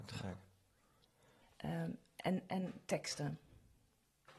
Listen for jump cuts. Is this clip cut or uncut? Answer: uncut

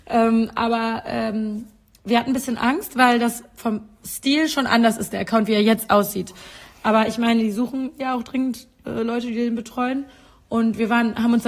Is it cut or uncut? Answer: uncut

